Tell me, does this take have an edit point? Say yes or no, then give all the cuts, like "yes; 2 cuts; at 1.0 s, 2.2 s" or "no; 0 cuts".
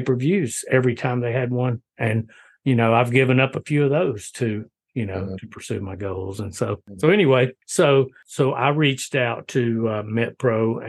no; 0 cuts